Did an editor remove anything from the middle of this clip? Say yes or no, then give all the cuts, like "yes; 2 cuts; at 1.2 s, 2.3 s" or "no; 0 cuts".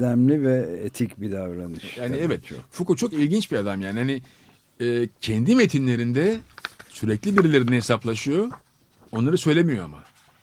no; 0 cuts